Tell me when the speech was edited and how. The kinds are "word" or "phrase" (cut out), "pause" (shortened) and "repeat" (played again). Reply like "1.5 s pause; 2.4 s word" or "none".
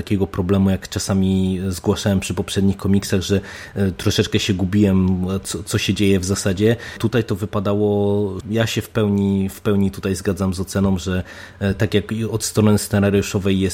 8.4 s phrase